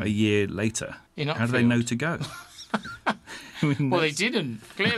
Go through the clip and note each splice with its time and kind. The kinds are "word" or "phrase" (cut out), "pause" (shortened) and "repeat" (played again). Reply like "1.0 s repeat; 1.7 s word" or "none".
1.1 s pause